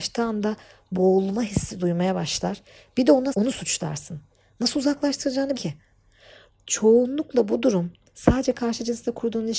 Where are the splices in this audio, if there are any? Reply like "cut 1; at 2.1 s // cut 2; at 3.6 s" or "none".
cut 1; at 3.3 s // cut 2; at 5.5 s